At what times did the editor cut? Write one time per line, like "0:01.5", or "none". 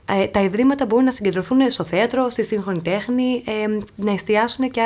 none